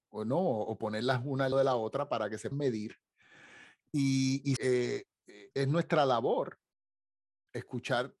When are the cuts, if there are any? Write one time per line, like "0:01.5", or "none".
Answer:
0:01.5
0:02.5
0:04.6
0:05.5

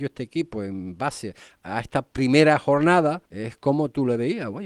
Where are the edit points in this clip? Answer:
0:03.2

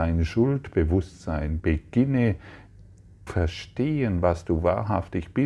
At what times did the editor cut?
0:01.6
0:03.3

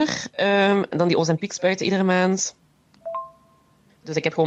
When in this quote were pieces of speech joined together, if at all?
none

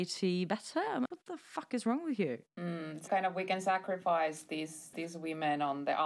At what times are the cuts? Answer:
0:01.1
0:03.1
0:04.9

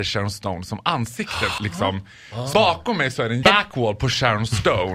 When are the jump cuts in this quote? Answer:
0:01.6
0:02.5
0:03.4

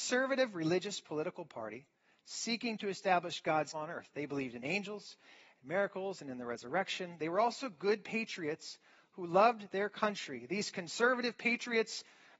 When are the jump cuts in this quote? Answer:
0:03.7

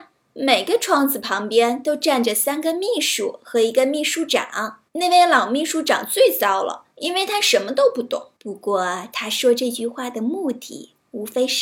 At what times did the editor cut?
0:04.9
0:06.9
0:08.4

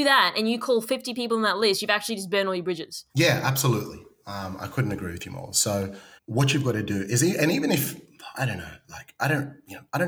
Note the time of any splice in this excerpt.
0:03.1
0:06.2

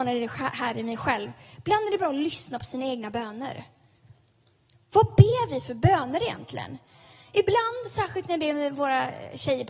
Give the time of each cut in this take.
none

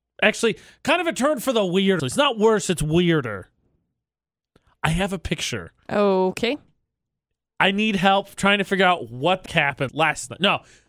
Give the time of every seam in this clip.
0:02.0
0:09.5
0:09.9

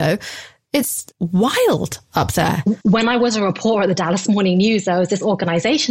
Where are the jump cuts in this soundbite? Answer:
0:01.1
0:02.8

